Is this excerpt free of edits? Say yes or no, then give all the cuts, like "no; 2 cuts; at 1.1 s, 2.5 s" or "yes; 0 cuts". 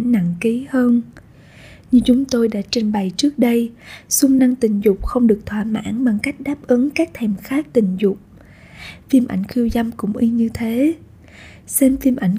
yes; 0 cuts